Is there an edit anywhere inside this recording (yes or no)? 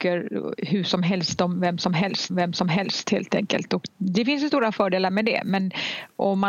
yes